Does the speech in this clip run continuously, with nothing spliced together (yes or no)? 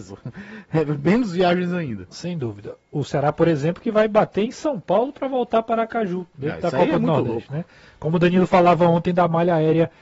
yes